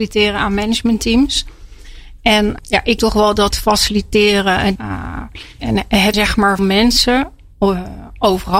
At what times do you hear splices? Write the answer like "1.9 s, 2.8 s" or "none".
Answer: 2.6 s, 3.0 s, 3.5 s, 4.8 s, 5.6 s, 6.1 s, 6.6 s